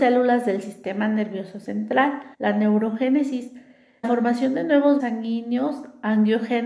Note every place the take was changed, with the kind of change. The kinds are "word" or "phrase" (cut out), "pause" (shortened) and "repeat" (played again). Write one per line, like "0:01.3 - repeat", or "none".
0:02.3 - pause
0:04.0 - word
0:05.0 - word